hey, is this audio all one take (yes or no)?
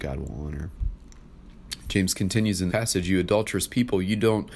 no